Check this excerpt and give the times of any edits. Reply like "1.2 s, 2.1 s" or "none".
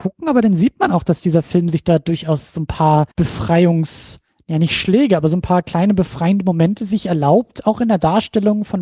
3.1 s